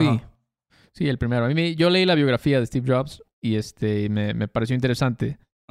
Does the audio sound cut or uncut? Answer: uncut